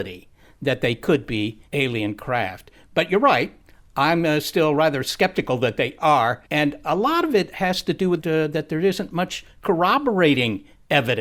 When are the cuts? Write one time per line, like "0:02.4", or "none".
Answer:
0:01.7
0:06.5
0:08.2